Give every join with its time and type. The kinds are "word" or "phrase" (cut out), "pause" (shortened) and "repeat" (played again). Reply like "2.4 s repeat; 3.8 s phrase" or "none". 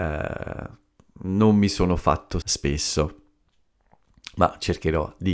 2.4 s word

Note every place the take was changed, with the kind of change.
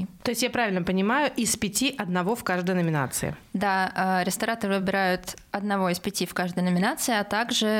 none

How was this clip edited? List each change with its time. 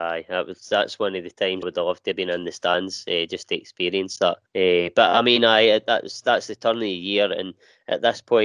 1.6 s word; 4.5 s pause

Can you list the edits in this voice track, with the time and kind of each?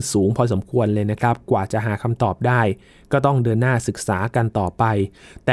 none

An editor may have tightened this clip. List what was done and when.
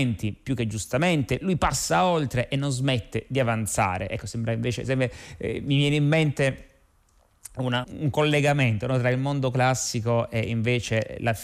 7.8 s word

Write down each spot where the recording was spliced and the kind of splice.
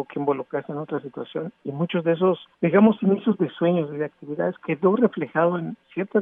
2.5 s pause

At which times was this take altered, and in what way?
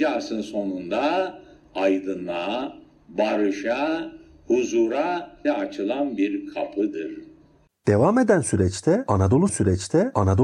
5.4 s word; 9.5 s repeat

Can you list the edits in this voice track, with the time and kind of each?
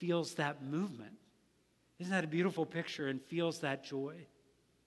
none

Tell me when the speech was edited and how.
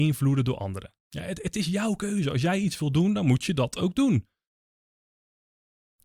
1.0 s pause

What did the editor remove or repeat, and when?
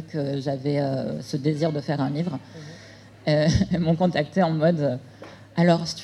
none

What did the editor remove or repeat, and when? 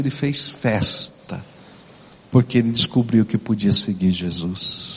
none

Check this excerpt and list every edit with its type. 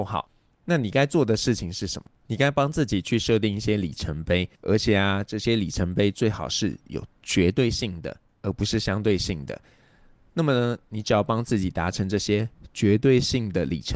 4.5 s pause

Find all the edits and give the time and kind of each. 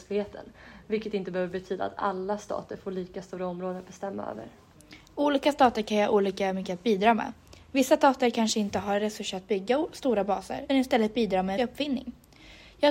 10.7 s word; 11.6 s word

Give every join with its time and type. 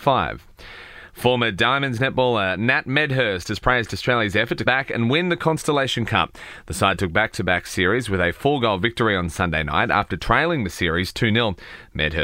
4.7 s word

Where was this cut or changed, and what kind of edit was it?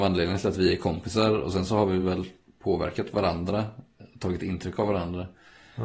none

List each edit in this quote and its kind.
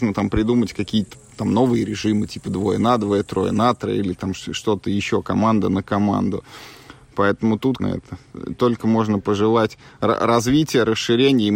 7.8 s word

